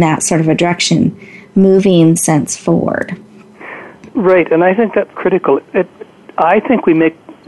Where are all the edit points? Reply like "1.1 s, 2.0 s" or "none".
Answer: 2.2 s, 5.1 s

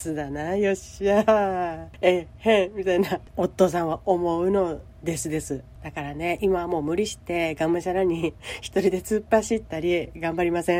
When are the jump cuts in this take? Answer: none

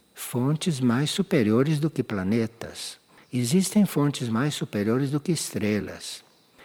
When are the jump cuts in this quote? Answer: none

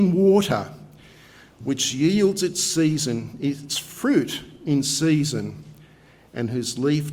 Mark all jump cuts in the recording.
none

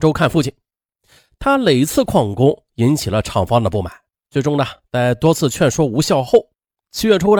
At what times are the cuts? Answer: 4.1 s

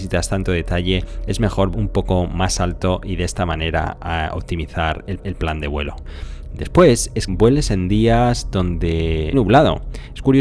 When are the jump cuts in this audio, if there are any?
1.7 s, 5.2 s, 7.3 s, 9.3 s

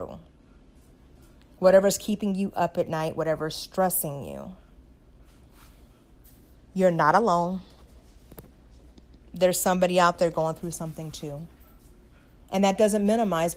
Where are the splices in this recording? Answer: none

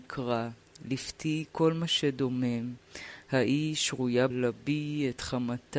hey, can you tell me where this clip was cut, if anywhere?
4.3 s

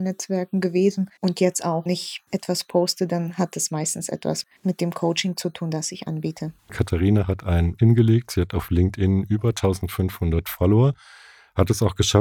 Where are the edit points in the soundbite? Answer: 1.2 s, 1.9 s, 2.3 s, 4.6 s, 6.6 s, 7.8 s

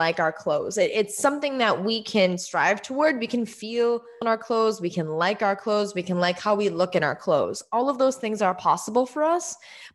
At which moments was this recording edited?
4.2 s

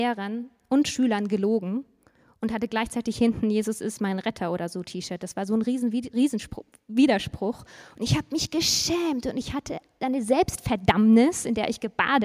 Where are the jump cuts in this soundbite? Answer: none

